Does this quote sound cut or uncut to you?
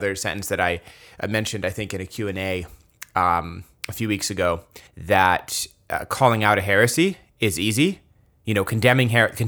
cut